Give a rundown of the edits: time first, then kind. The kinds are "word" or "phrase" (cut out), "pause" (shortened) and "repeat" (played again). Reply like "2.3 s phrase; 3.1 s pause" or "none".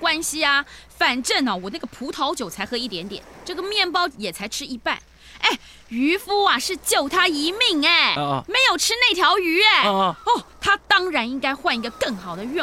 none